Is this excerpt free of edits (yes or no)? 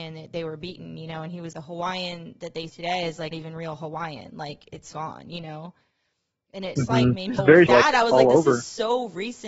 no